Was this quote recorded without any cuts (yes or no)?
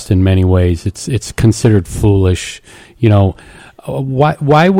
yes